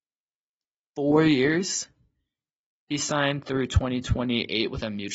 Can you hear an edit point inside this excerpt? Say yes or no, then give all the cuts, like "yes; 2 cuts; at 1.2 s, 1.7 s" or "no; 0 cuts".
no; 0 cuts